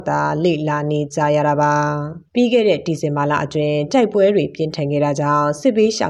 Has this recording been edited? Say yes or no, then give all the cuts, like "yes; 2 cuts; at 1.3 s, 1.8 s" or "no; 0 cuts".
yes; 1 cut; at 2.3 s